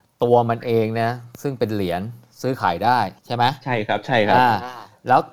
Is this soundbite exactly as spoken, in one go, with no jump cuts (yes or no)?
no